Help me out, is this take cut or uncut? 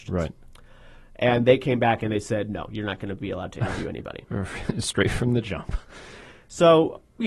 uncut